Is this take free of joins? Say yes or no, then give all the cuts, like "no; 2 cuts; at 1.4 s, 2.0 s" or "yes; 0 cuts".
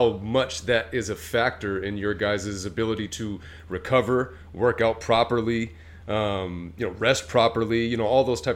yes; 0 cuts